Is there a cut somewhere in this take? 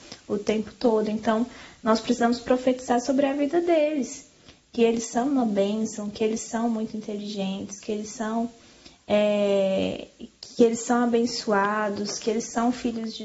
no; 0 cuts

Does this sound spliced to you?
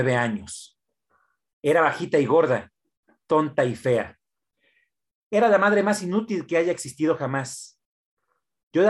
no; 0 cuts

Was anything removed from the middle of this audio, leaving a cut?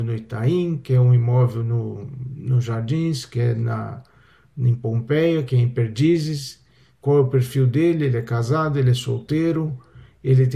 no; 0 cuts

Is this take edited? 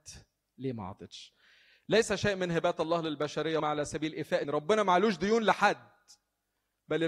yes; 2 cuts; at 3.6 s, 4.4 s

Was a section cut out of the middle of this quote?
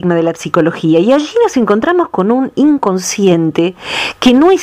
no; 0 cuts

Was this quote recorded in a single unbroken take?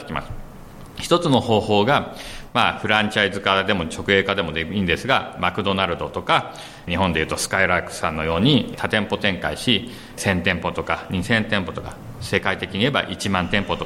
no; 1 cut; at 10.2 s

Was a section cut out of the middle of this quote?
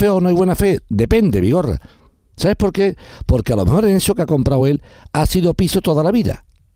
no; 0 cuts

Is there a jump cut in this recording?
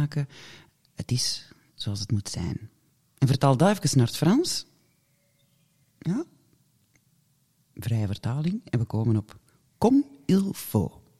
no; 0 cuts

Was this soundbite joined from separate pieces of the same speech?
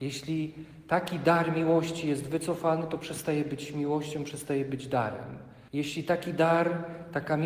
yes; 1 cut; at 5.7 s

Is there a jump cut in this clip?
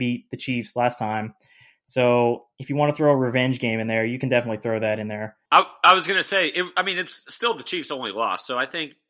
no; 0 cuts

